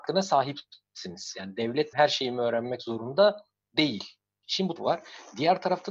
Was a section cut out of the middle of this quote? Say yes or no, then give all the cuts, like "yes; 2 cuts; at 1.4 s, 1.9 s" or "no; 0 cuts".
yes; 2 cuts; at 1.9 s, 4.8 s